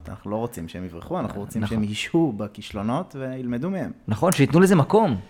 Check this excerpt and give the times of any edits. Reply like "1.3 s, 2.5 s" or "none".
none